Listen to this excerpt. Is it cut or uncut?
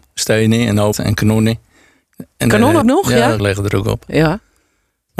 cut